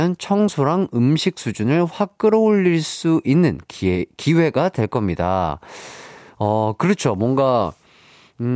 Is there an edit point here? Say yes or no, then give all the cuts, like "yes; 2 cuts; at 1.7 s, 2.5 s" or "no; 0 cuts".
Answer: no; 0 cuts